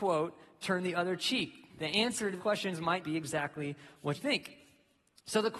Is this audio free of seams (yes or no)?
no